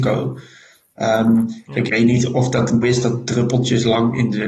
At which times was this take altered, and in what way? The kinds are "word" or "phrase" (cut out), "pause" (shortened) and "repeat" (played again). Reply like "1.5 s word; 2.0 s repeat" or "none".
1.9 s word; 2.8 s word